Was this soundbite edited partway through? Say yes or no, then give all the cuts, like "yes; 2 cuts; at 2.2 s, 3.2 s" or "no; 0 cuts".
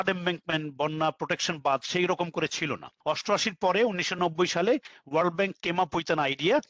no; 0 cuts